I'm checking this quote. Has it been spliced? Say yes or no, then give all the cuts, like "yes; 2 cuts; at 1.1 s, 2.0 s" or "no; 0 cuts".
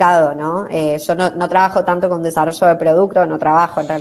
no; 0 cuts